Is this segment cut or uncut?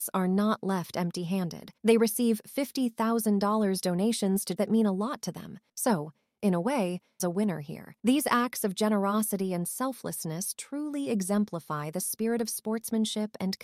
cut